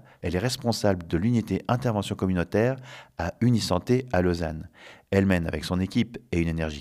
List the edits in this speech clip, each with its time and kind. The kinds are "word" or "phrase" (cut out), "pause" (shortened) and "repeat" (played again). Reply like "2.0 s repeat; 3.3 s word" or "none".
none

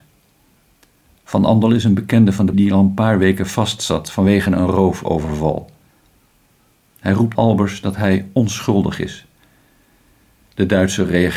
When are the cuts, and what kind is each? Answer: 2.5 s word; 7.4 s word

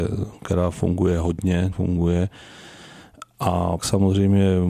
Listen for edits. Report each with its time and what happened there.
1.7 s word; 3.8 s word

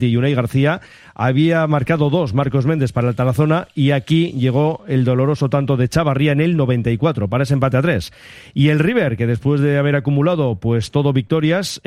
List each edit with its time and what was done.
none

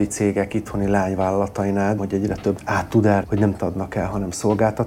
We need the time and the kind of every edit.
2.0 s word; 2.6 s phrase; 3.2 s word; 3.6 s word

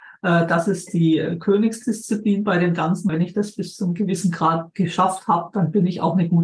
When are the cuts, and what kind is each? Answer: 3.1 s word

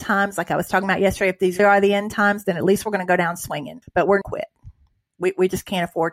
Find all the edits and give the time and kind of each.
1.6 s word; 3.8 s pause; 4.2 s phrase

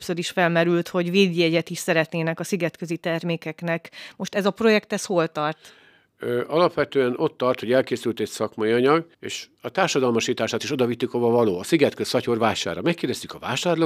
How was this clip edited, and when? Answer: 9.1 s pause

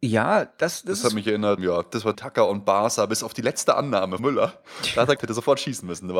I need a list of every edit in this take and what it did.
1.6 s word; 2.1 s word; 4.2 s word; 5.2 s word

